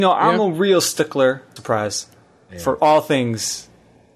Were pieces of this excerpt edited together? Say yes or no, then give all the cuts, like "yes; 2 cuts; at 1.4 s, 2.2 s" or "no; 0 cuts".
yes; 2 cuts; at 1.6 s, 2.8 s